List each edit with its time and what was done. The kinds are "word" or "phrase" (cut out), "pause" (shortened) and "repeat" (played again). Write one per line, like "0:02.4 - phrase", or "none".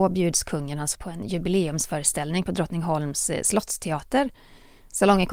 0:00.9 - word